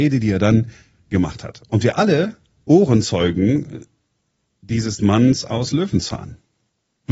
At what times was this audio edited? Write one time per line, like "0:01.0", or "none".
0:02.6
0:05.0

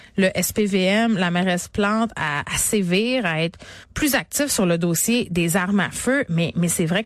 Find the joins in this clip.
0:03.8

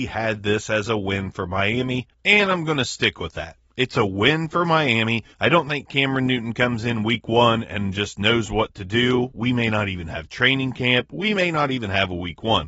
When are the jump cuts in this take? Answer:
0:02.1
0:05.3

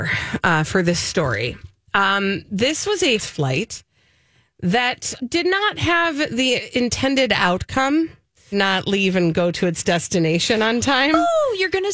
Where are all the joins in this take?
0:03.2
0:05.2
0:08.5

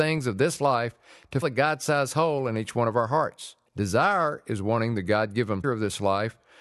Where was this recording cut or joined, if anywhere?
0:01.4
0:03.7
0:05.6

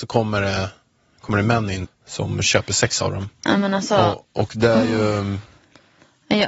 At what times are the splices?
0:01.8

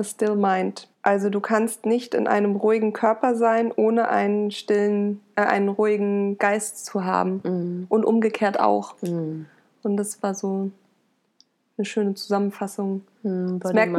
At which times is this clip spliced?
0:00.9

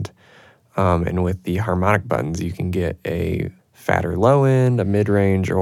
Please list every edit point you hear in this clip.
0:03.6

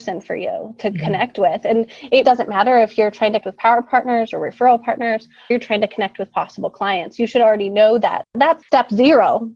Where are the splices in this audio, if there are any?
0:02.2
0:03.4
0:05.5
0:08.6

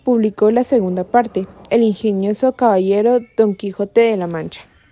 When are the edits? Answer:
0:01.7

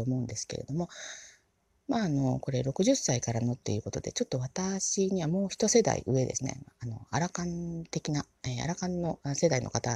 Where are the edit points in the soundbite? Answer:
none

